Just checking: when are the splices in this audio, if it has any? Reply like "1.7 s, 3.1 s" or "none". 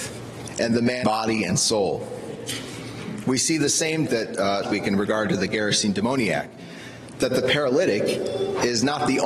1.0 s, 4.1 s, 4.6 s